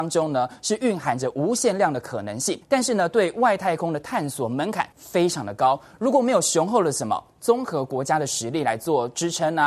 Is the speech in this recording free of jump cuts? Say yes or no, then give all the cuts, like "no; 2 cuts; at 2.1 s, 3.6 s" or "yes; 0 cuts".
no; 2 cuts; at 2.6 s, 4.9 s